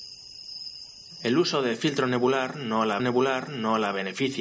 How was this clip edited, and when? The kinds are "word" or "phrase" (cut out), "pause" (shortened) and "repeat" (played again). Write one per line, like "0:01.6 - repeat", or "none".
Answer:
0:03.0 - repeat